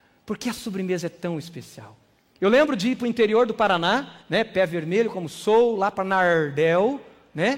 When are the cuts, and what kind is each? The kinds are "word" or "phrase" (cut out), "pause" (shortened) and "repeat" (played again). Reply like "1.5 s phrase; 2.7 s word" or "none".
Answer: 4.2 s pause